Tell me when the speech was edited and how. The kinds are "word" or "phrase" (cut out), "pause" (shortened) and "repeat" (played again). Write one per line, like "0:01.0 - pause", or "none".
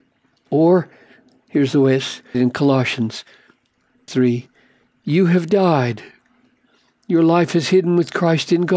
0:02.3 - word
0:04.1 - word